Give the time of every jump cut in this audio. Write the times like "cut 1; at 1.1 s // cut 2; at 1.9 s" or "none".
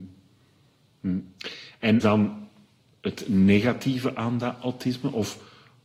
cut 1; at 2.0 s

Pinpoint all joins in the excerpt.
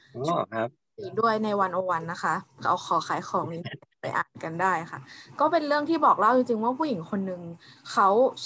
none

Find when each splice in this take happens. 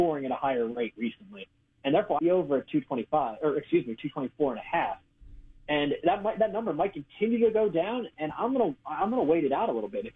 cut 1; at 2.2 s

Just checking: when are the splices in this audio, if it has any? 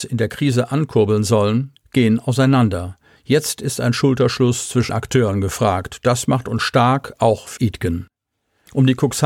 cut 1; at 4.9 s // cut 2; at 7.6 s

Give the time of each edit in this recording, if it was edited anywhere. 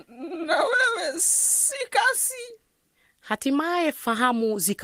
none

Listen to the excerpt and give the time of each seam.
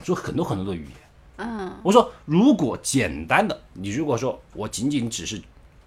none

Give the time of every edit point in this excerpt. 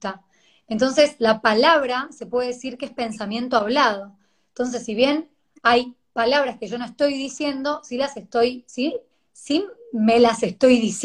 none

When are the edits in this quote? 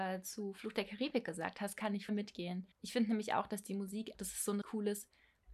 cut 1; at 2.1 s // cut 2; at 2.7 s // cut 3; at 4.1 s // cut 4; at 4.6 s

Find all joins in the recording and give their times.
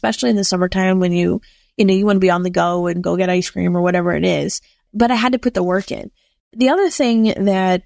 none

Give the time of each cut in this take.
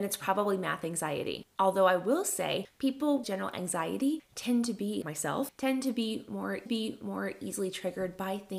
cut 1; at 3.2 s // cut 2; at 5.0 s // cut 3; at 6.7 s

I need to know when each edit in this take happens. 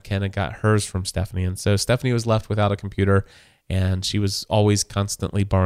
none

